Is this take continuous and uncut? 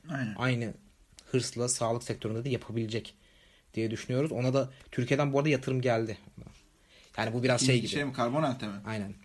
yes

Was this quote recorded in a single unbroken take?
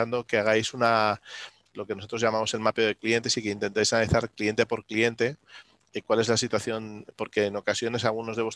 yes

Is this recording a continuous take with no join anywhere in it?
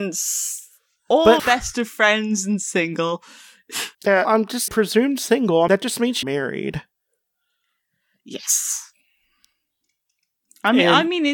no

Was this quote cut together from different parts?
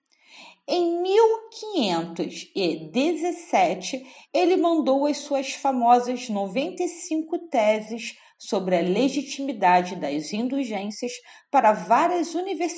no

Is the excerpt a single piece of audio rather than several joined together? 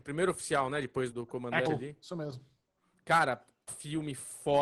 no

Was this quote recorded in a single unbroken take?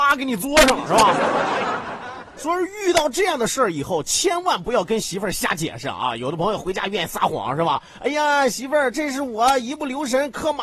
yes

